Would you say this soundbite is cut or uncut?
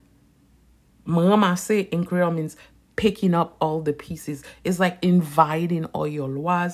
uncut